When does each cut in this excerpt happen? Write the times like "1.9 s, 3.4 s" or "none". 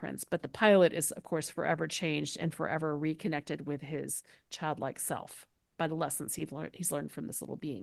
none